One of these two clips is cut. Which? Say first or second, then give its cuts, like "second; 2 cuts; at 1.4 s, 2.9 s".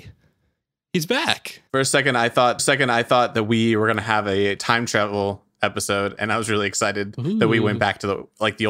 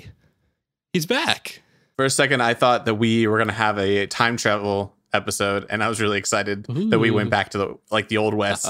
first; 2 cuts; at 1.7 s, 2.6 s